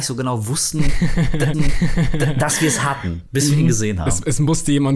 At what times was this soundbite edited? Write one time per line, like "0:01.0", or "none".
0:01.5